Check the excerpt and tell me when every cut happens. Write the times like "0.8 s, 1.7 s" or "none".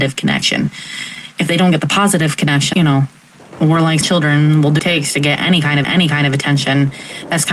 2.7 s, 4.0 s, 4.8 s, 5.8 s